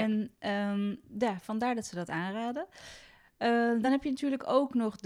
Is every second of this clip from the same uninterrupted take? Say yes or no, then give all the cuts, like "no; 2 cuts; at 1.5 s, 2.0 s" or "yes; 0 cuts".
yes; 0 cuts